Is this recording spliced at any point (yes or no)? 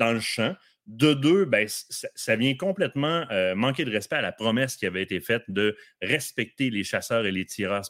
no